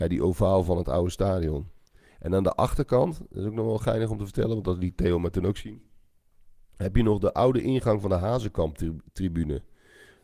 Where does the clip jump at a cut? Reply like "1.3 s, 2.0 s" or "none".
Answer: none

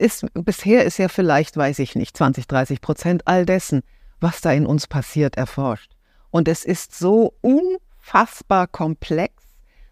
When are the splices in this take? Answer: 7.4 s

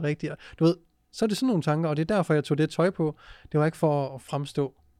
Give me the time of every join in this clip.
none

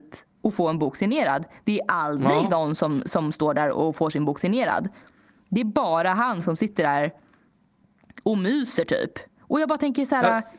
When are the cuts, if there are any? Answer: none

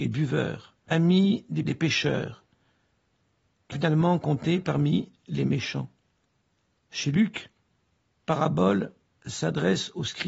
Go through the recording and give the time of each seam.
1.6 s, 3.7 s, 8.2 s

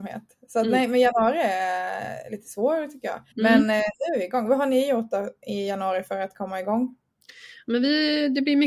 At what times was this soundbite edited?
3.3 s

